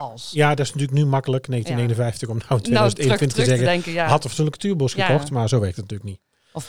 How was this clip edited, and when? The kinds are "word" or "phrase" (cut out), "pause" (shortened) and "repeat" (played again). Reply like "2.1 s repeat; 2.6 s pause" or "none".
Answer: none

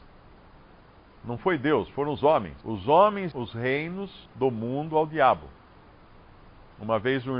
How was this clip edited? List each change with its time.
2.6 s pause; 3.3 s word; 4.3 s pause

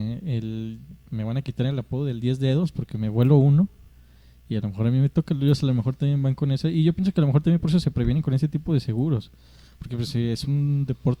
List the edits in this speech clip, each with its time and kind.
none

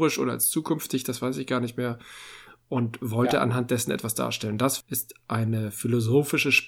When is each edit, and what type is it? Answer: none

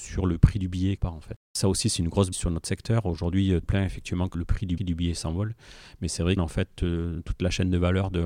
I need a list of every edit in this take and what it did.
1.0 s word; 2.3 s word; 3.6 s phrase; 4.3 s word; 4.8 s repeat; 6.4 s phrase

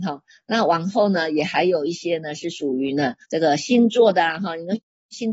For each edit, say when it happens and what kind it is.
3.2 s pause

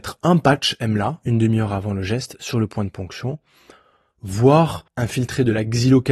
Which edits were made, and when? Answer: 4.9 s pause

